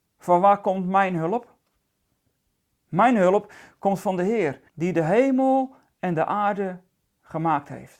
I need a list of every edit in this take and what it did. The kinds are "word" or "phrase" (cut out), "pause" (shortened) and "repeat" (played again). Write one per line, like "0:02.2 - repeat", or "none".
0:04.7 - pause